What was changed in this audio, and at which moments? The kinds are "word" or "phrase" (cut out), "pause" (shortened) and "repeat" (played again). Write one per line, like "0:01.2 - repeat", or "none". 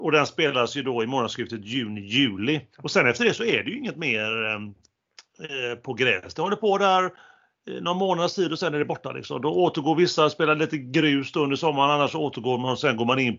0:02.7 - pause

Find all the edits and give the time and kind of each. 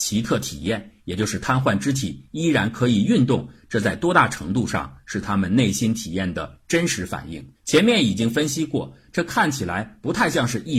0:07.5 - pause

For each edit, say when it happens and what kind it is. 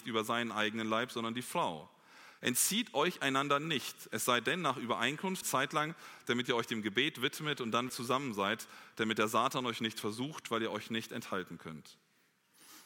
0:05.4 - word
0:07.9 - word

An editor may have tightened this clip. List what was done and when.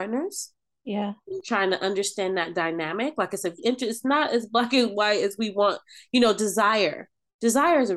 0:03.6 - word

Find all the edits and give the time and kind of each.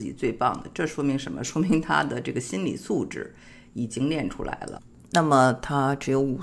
none

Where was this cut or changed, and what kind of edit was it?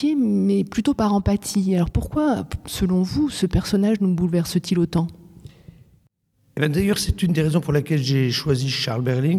none

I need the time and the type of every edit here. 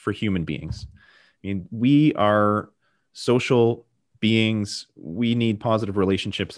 none

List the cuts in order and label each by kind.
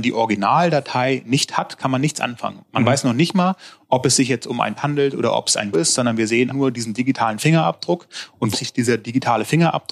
0:04.8 - word
0:05.7 - word
0:06.5 - word
0:08.5 - word

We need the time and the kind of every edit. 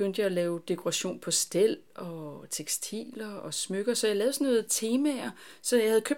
none

